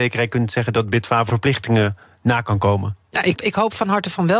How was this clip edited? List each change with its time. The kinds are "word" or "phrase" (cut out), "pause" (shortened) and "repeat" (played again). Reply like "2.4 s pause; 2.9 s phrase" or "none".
1.3 s word; 3.3 s word